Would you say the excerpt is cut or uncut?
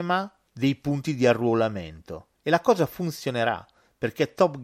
uncut